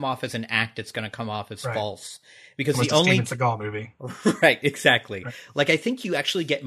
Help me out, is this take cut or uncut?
uncut